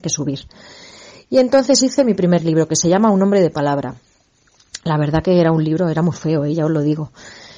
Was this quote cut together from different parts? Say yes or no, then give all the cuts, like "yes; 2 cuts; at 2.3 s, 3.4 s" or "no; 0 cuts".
no; 0 cuts